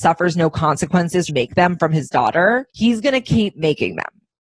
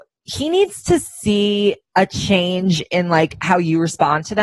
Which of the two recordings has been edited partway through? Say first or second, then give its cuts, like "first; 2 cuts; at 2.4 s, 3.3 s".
first; 2 cuts; at 1.3 s, 2.7 s